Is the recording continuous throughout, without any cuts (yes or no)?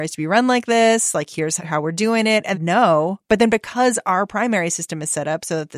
no